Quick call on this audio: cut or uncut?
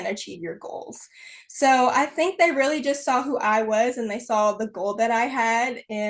uncut